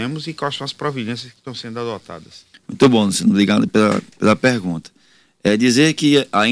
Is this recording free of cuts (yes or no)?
yes